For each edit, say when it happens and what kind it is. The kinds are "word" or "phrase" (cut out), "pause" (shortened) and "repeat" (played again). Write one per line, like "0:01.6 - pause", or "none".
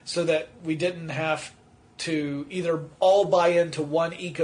none